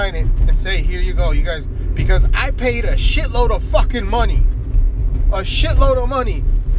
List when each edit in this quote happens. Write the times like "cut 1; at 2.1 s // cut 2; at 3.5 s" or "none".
none